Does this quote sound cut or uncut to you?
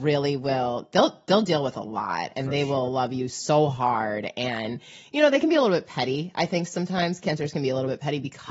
uncut